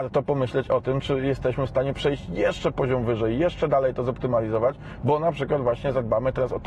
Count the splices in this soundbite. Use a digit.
0